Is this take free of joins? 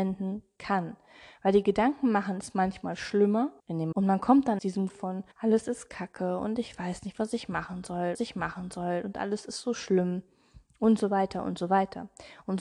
no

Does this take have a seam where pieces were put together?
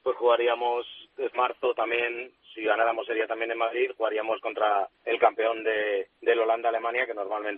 yes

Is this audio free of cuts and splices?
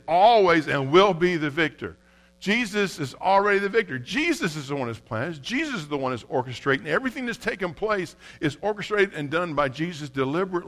yes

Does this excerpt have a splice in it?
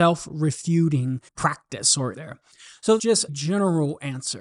yes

